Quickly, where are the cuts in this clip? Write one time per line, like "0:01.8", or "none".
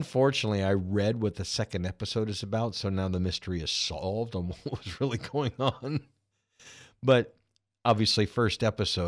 none